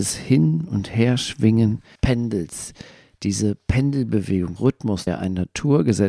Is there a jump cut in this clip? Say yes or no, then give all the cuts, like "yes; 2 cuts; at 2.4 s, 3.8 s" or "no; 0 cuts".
yes; 3 cuts; at 2.0 s, 4.6 s, 5.1 s